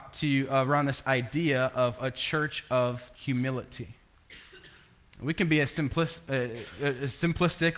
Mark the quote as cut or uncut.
cut